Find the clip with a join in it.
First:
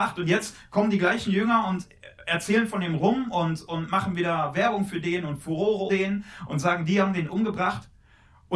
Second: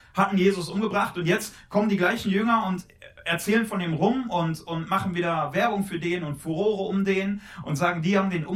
first; 1 cut; at 5.9 s

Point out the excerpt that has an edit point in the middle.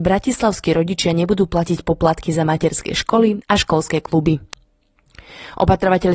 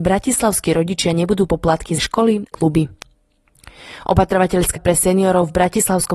second; 4 cuts; at 1.5 s, 2.0 s, 2.5 s, 4.8 s

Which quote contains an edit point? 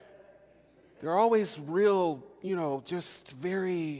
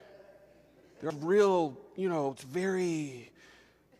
second; 2 cuts; at 1.1 s, 2.4 s

